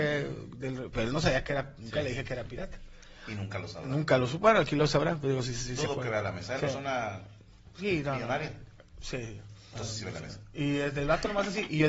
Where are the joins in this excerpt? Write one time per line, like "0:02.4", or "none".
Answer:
0:06.6
0:09.7